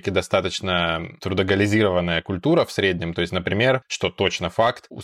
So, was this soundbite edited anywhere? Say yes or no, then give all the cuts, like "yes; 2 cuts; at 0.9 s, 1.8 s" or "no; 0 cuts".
no; 0 cuts